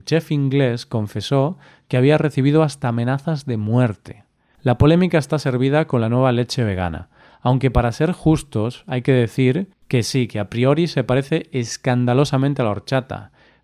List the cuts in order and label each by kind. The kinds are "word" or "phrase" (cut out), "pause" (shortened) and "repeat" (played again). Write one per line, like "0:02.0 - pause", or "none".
none